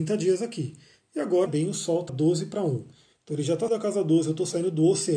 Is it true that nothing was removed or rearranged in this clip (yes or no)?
no